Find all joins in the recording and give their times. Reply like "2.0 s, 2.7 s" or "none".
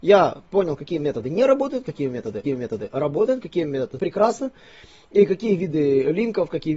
2.4 s, 4.0 s